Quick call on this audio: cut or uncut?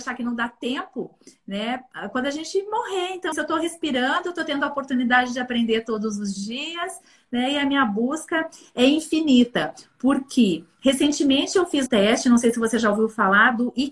cut